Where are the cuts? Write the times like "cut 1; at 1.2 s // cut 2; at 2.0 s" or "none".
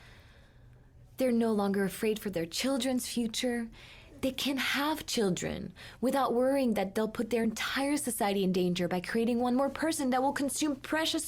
none